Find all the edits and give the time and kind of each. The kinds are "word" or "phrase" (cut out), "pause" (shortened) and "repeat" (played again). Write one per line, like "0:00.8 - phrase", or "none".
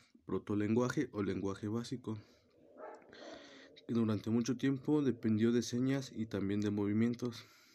none